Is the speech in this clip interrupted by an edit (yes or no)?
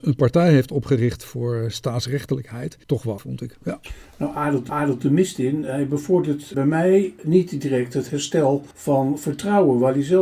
yes